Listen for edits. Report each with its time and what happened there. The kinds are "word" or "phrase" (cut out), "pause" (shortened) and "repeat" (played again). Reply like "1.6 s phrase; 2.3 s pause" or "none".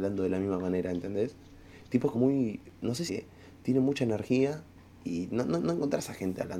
2.1 s word; 3.1 s phrase; 4.8 s pause; 5.6 s repeat

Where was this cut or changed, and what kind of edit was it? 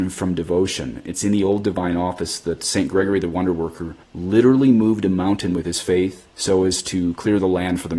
4.0 s pause; 6.3 s pause

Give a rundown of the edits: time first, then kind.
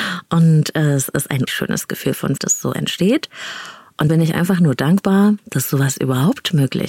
1.5 s word; 2.4 s word; 4.1 s word

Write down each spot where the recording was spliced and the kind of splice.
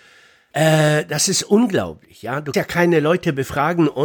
2.5 s word

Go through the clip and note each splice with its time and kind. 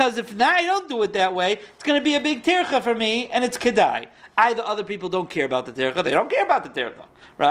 none

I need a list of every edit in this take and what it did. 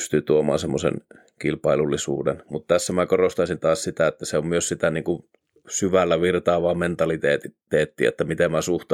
none

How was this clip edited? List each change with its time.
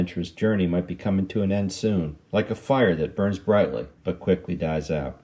4.0 s pause

